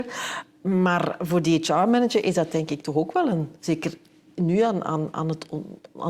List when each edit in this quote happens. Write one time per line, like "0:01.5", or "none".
0:03.6